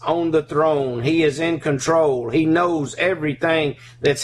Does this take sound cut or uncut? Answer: uncut